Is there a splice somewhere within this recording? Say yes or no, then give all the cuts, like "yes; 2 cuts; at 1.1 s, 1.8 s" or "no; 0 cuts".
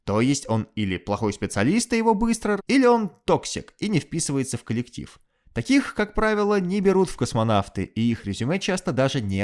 yes; 1 cut; at 2.6 s